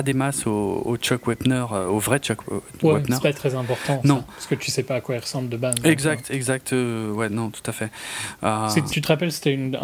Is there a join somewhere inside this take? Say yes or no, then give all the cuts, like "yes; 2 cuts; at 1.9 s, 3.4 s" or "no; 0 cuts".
yes; 1 cut; at 8.9 s